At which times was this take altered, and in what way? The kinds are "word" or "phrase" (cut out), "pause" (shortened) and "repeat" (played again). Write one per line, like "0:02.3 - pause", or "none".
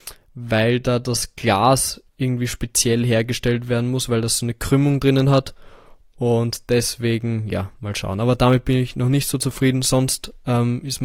0:02.1 - pause